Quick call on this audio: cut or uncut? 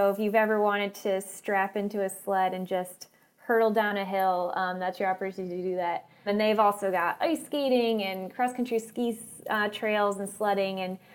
uncut